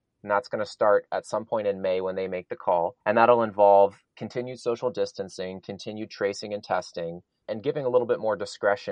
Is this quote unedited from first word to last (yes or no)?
no